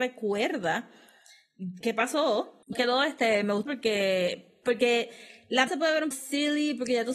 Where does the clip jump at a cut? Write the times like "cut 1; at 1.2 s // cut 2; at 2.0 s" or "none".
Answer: cut 1; at 1.8 s // cut 2; at 2.7 s // cut 3; at 3.7 s // cut 4; at 5.7 s // cut 5; at 6.1 s